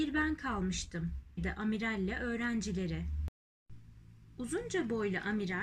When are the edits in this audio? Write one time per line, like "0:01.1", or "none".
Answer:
0:01.4